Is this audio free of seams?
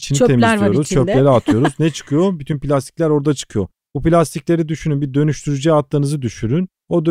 yes; 0 cuts

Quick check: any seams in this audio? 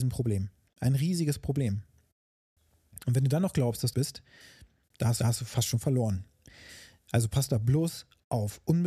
yes; 2 cuts; at 3.9 s, 5.2 s

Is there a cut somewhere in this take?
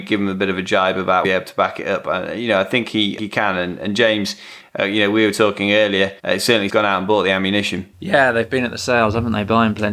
yes; 4 cuts; at 1.2 s, 3.2 s, 6.2 s, 6.7 s

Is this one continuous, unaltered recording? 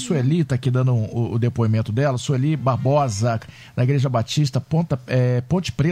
yes; 0 cuts

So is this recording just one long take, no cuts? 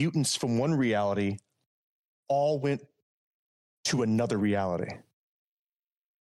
yes; 0 cuts

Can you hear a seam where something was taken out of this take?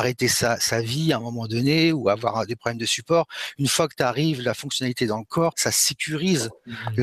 yes; 1 cut; at 5.5 s

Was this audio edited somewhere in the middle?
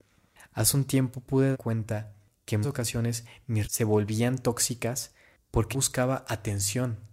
yes; 4 cuts; at 1.5 s, 2.6 s, 3.6 s, 5.7 s

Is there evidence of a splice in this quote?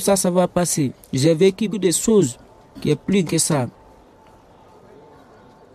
yes; 2 cuts; at 1.7 s, 3.2 s

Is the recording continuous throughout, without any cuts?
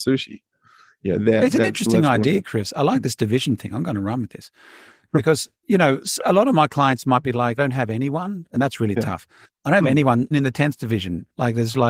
no; 3 cuts; at 7.6 s, 8.5 s, 10.3 s

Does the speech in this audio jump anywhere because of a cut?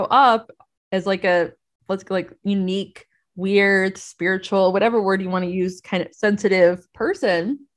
no; 0 cuts

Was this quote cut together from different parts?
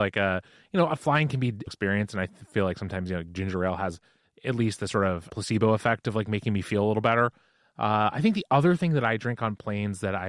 yes; 2 cuts; at 1.7 s, 5.3 s

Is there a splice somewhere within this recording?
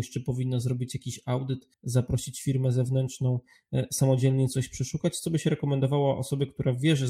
yes; 1 cut; at 1.7 s

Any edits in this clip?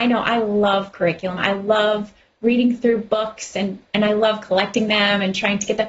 no; 0 cuts

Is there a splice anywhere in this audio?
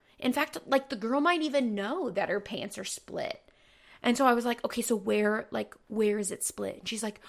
no; 0 cuts

